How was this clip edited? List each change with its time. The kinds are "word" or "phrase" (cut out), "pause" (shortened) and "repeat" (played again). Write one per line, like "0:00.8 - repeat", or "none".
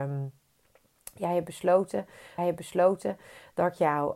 0:02.4 - repeat